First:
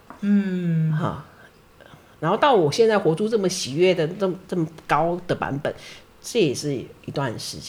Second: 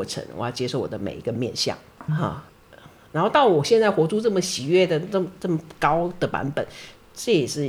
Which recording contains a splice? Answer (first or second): second